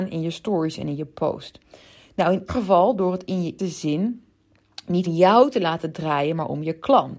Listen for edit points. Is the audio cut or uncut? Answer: cut